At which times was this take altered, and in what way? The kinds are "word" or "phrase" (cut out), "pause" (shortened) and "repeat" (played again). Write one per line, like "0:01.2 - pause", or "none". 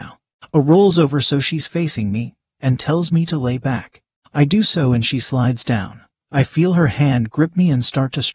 none